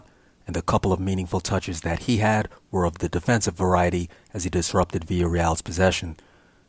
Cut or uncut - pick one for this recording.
uncut